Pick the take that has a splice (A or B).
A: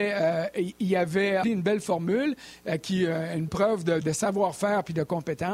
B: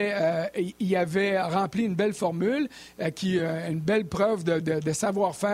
A